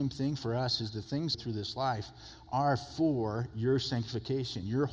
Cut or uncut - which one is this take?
cut